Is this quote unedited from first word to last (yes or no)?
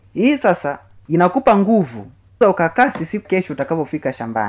no